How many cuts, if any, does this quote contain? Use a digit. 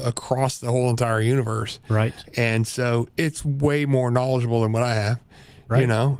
1